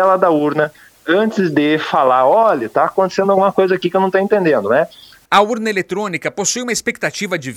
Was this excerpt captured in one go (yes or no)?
yes